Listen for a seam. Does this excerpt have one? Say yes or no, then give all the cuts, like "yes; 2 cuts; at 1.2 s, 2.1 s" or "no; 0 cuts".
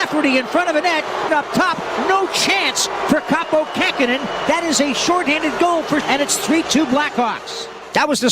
yes; 2 cuts; at 1.3 s, 6.0 s